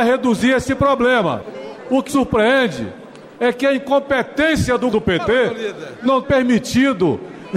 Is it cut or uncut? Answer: cut